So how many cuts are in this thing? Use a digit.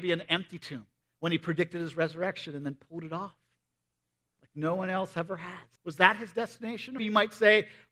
3